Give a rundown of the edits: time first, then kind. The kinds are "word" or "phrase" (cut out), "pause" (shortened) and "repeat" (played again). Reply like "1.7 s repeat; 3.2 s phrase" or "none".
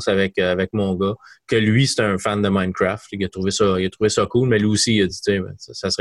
none